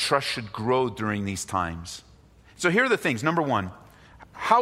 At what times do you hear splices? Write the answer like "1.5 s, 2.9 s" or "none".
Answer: none